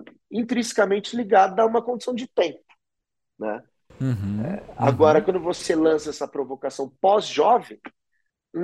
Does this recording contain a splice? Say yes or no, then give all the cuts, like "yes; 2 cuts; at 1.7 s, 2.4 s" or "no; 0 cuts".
no; 0 cuts